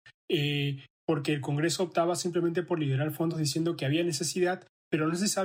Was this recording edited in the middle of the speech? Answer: no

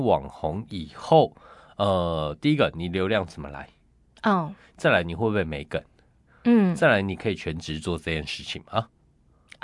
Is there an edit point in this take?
no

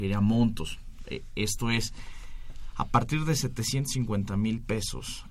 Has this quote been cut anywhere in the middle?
no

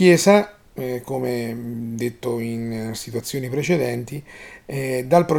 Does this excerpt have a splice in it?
no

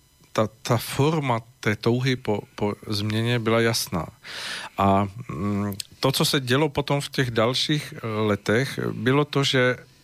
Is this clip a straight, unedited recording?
yes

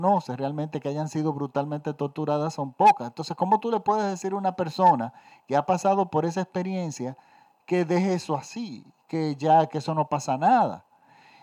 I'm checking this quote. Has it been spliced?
no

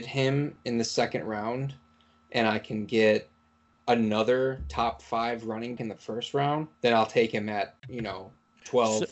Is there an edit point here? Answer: yes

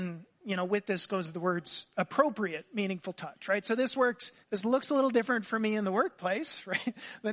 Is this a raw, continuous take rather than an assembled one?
no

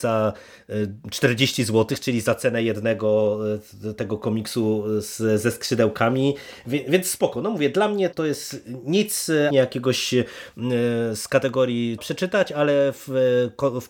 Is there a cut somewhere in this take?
yes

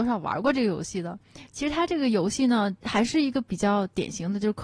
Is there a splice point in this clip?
yes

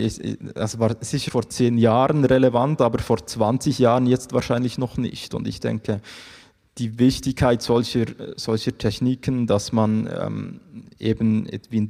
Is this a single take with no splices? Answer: no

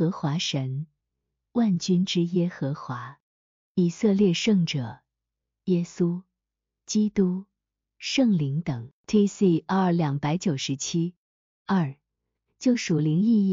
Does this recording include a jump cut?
no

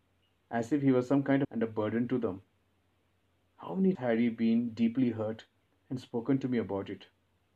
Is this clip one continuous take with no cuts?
no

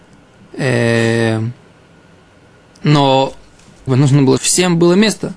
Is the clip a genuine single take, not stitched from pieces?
no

